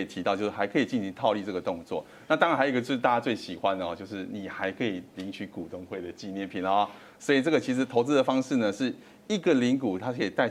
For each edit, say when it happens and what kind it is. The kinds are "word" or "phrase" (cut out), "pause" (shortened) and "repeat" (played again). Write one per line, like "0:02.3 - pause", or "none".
none